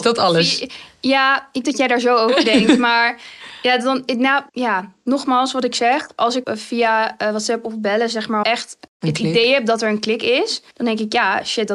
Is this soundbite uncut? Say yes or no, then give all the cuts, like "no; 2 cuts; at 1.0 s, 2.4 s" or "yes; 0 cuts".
no; 6 cuts; at 1.6 s, 4.5 s, 6.4 s, 8.4 s, 8.9 s, 10.7 s